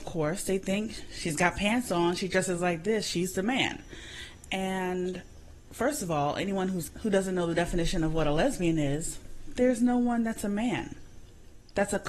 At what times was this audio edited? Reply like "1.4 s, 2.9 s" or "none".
none